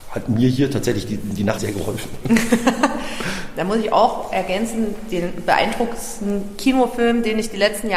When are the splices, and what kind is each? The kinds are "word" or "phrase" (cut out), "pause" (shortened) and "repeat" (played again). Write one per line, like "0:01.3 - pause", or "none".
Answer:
0:01.6 - word